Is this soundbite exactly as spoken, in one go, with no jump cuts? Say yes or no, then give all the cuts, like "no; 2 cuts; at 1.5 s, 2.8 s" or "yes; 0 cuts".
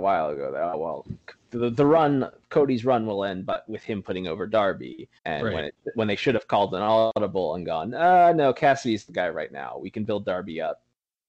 no; 1 cut; at 5.2 s